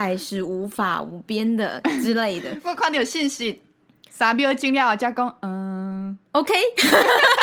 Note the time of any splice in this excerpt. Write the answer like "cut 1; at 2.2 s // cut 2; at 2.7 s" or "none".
none